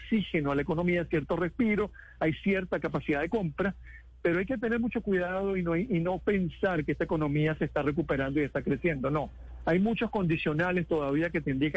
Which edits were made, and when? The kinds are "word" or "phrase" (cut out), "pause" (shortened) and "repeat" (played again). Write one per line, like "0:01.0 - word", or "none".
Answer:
none